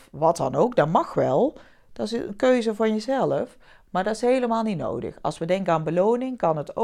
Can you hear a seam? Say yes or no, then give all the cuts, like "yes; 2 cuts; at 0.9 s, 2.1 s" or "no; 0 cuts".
no; 0 cuts